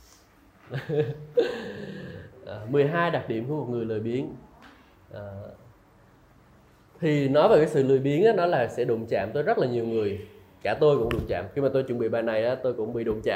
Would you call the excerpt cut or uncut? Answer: uncut